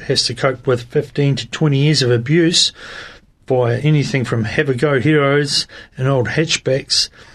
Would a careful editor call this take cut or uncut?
uncut